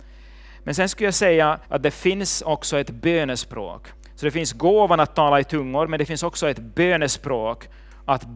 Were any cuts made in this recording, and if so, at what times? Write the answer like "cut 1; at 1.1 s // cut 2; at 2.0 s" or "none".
cut 1; at 1.6 s // cut 2; at 4.0 s